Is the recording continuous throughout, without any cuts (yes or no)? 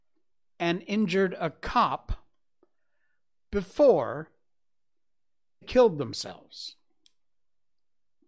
no